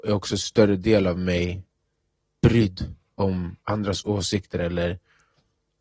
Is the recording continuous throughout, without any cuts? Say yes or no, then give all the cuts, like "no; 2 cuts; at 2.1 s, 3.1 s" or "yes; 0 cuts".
no; 1 cut; at 3.6 s